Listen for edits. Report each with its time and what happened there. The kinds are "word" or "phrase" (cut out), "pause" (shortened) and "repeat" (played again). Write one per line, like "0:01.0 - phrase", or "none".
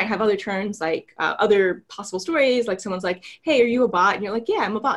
none